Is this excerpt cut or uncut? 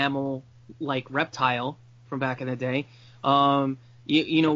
uncut